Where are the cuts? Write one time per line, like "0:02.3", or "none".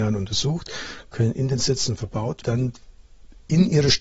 0:02.4